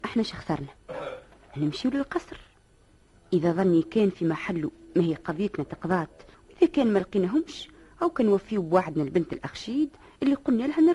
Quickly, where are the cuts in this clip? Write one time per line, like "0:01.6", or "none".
0:06.3